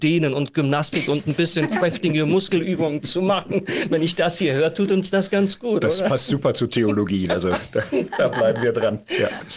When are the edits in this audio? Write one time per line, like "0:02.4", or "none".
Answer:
none